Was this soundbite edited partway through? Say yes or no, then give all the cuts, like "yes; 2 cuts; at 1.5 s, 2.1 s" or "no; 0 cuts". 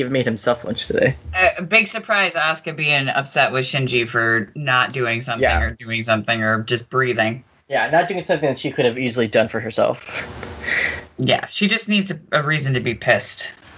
no; 0 cuts